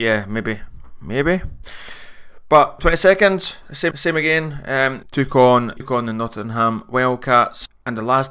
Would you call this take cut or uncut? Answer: cut